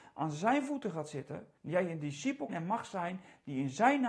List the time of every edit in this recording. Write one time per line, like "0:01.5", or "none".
0:01.6
0:02.5